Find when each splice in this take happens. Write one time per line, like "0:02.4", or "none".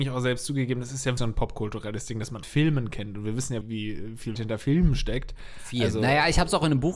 0:01.2
0:02.4
0:03.6
0:04.4